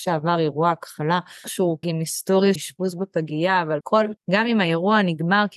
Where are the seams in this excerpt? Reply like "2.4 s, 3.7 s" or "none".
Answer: 1.4 s, 1.8 s, 2.6 s, 3.8 s, 4.2 s